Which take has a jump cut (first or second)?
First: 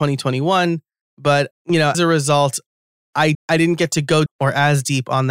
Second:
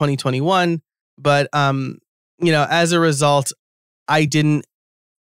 first